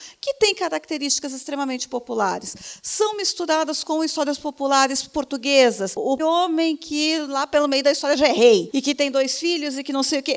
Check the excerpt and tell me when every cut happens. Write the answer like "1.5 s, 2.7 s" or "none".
6.2 s